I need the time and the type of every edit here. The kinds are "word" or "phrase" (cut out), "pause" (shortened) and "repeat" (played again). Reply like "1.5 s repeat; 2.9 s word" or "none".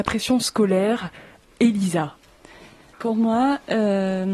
2.9 s word